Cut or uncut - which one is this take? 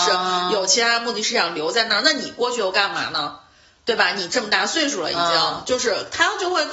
uncut